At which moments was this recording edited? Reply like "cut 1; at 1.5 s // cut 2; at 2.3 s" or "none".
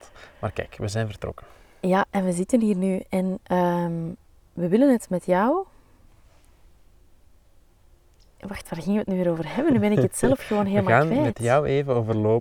none